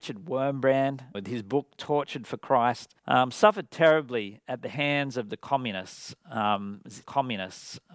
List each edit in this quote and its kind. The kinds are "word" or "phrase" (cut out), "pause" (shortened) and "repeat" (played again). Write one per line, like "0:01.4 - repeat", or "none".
0:01.1 - word
0:03.0 - pause
0:07.0 - repeat